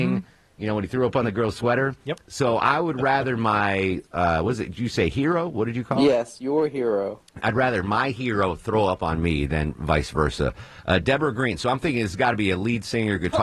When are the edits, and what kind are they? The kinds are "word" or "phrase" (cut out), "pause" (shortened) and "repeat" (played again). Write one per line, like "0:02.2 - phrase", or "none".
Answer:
none